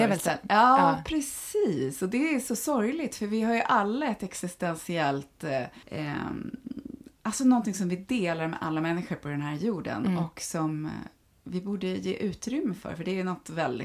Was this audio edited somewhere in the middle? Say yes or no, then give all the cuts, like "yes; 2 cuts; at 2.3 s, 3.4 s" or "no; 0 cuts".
no; 0 cuts